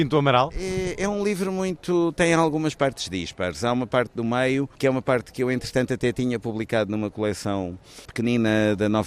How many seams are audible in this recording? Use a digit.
1